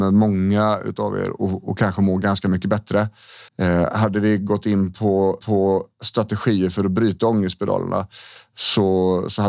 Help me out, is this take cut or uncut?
cut